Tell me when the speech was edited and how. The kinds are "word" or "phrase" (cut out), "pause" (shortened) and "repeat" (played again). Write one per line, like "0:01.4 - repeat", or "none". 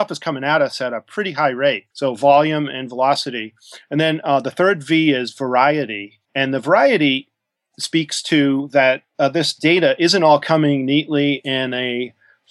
0:01.9 - pause
0:06.2 - pause